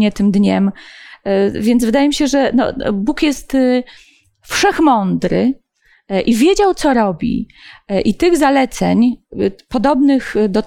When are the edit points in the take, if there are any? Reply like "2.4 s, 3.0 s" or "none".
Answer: none